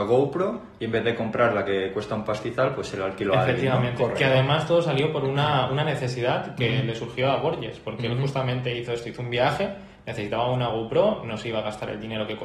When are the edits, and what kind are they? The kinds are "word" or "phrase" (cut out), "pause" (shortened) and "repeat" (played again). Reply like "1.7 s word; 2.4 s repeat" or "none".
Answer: none